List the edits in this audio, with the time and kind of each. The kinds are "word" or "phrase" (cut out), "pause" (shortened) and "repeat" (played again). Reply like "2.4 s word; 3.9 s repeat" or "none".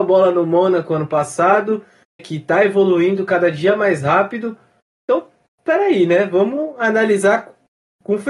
2.2 s word